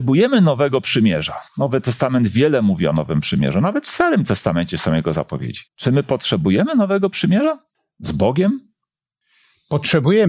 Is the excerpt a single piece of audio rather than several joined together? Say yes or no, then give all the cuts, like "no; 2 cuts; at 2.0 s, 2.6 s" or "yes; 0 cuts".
no; 3 cuts; at 1.5 s, 5.7 s, 7.7 s